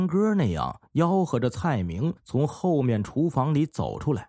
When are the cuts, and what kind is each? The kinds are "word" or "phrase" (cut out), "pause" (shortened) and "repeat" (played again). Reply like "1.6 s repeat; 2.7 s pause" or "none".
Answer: 2.2 s pause